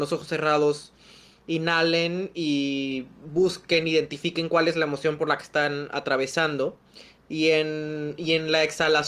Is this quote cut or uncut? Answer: uncut